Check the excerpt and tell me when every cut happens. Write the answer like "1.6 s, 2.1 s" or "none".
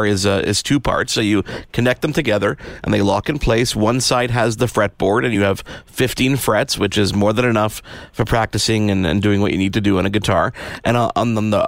none